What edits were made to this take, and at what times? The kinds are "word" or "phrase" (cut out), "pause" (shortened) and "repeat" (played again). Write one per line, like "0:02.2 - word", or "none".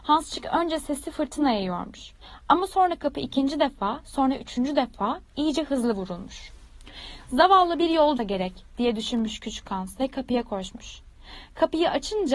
0:08.2 - word